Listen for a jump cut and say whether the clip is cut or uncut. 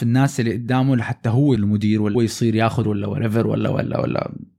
cut